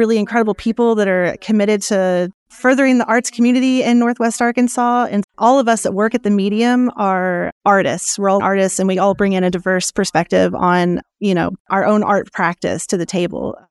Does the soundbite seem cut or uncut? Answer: cut